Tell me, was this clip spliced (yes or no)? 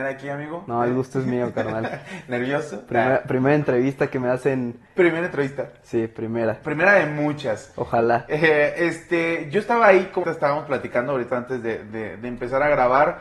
yes